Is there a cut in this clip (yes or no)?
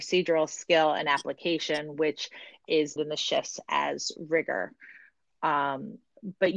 yes